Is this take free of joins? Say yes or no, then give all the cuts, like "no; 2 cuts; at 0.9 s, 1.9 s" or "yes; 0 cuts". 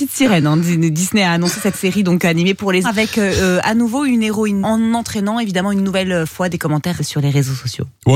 no; 4 cuts; at 1.7 s, 2.8 s, 4.6 s, 7.0 s